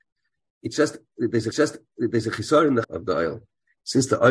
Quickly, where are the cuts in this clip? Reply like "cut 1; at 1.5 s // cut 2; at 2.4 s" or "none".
cut 1; at 1.5 s // cut 2; at 2.8 s